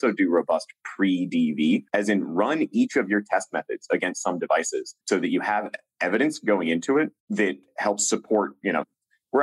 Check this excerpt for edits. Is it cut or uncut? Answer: cut